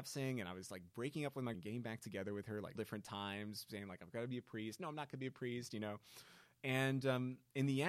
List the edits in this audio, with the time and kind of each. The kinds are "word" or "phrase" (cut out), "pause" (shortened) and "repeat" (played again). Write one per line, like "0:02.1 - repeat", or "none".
0:01.5 - word
0:02.8 - word